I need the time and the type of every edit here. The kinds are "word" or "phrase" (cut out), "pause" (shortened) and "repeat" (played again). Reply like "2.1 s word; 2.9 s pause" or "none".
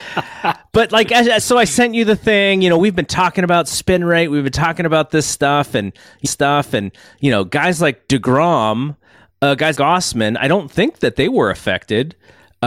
6.2 s repeat; 9.7 s word

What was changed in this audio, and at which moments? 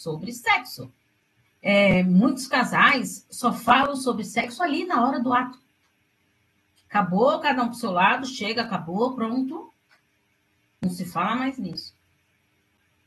1.4 s pause

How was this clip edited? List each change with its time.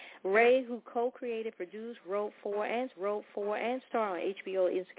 2.9 s repeat

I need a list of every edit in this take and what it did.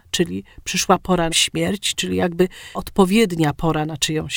1.3 s phrase; 2.7 s word

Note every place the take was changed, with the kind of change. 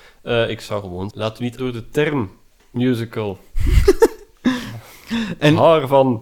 1.1 s word; 1.6 s word

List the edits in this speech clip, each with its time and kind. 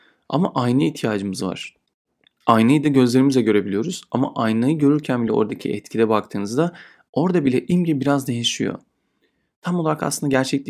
none

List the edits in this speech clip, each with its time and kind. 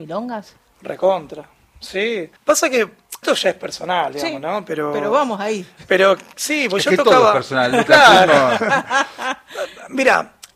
2.4 s pause; 3.2 s word

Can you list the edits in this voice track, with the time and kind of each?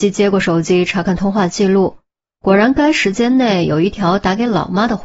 none

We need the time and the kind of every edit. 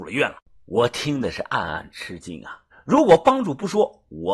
2.7 s pause

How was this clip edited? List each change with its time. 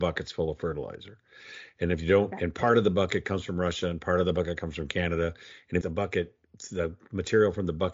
5.8 s phrase

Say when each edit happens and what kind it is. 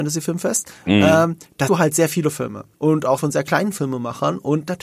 1.7 s word; 2.7 s pause; 3.2 s phrase

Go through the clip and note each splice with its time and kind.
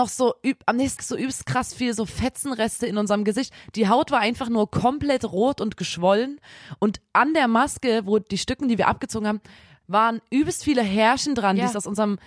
1.0 s word; 9.8 s word

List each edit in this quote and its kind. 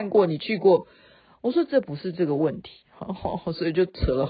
none

